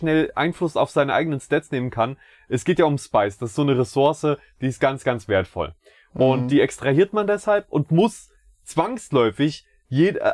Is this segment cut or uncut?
uncut